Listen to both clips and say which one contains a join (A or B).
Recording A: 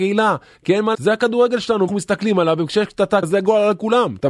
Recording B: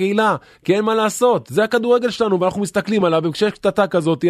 A